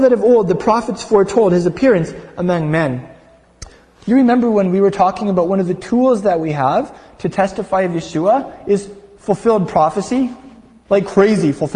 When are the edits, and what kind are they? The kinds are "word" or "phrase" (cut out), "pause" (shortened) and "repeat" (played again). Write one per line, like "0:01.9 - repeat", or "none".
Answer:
none